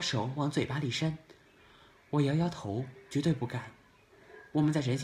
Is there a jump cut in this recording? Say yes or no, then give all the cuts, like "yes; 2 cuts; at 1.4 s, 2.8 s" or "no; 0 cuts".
no; 0 cuts